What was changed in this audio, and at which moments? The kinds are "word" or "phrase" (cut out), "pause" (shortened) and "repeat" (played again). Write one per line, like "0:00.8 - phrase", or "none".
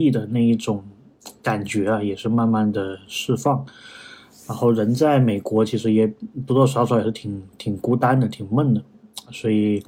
none